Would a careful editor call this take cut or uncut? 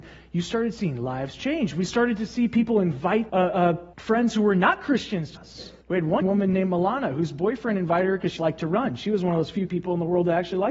cut